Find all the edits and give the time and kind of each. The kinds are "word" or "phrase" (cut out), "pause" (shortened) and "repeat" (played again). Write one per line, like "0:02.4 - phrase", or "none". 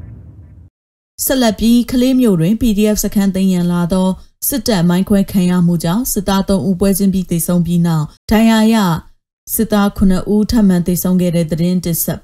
0:08.2 - pause